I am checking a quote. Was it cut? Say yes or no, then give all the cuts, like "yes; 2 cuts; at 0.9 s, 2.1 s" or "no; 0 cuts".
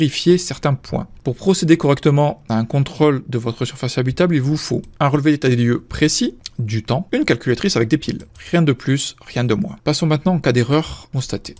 no; 0 cuts